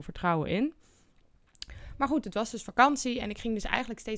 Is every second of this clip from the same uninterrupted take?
yes; 0 cuts

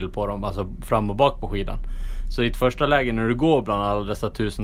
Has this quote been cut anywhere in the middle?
no; 0 cuts

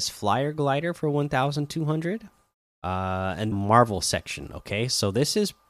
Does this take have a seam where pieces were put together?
yes; 2 cuts; at 2.6 s, 3.5 s

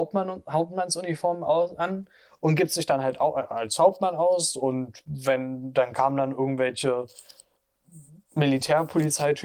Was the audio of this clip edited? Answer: no; 0 cuts

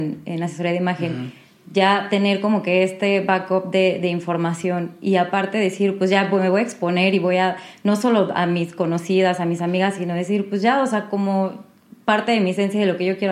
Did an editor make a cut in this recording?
no; 0 cuts

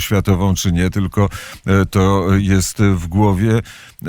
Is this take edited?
no; 0 cuts

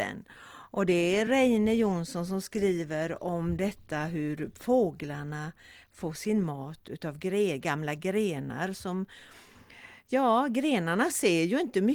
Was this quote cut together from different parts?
no; 0 cuts

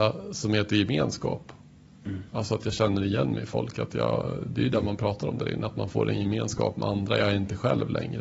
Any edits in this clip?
no; 0 cuts

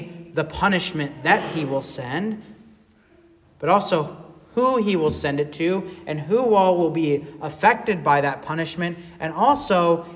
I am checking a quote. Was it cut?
no; 0 cuts

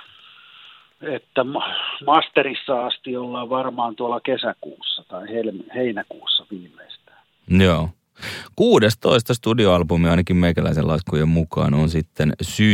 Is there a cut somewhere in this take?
no; 0 cuts

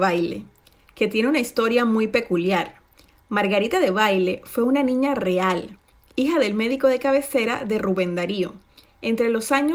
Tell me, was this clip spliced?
no; 0 cuts

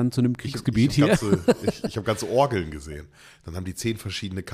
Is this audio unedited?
yes; 0 cuts

